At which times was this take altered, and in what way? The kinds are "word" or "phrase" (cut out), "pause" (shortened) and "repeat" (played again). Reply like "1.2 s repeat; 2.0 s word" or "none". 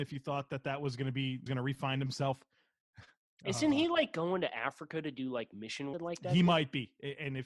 1.5 s phrase; 5.9 s phrase